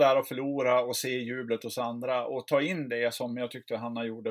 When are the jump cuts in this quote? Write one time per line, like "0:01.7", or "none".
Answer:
none

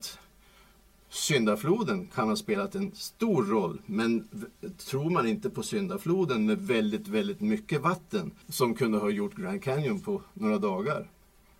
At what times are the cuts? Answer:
0:08.4

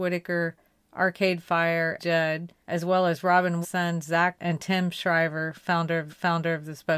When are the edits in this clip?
0:02.0
0:02.6
0:03.6
0:04.4
0:06.1

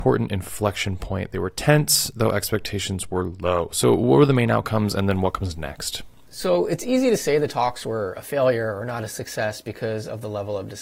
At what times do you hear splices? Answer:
none

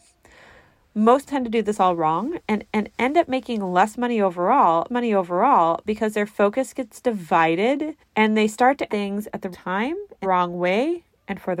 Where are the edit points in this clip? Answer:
0:01.3
0:02.7
0:04.9
0:08.0
0:08.9
0:09.5
0:10.2

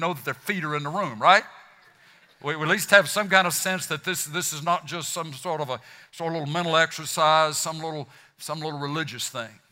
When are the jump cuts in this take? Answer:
none

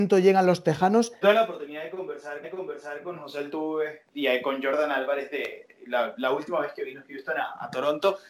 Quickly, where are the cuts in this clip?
0:01.2
0:02.4
0:04.1

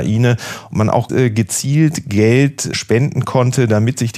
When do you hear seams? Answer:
0:01.1
0:02.7

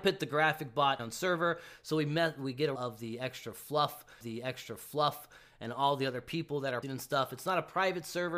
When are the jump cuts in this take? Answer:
0:01.0
0:02.8
0:04.2
0:06.8

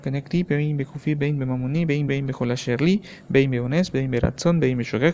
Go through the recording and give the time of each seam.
0:02.1

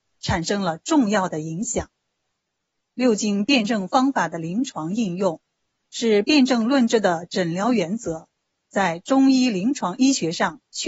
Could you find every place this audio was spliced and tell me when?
none

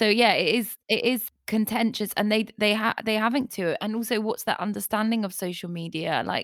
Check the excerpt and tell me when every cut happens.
0:03.5

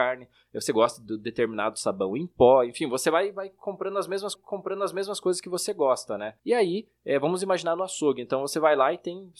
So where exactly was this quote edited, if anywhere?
0:04.3
0:06.4

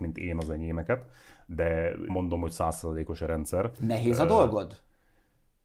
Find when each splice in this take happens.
0:02.1

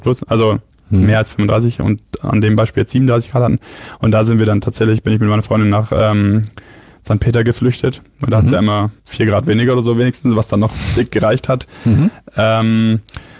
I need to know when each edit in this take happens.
0:09.0

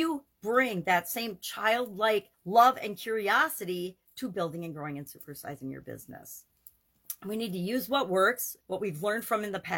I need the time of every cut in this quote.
0:02.3
0:08.6

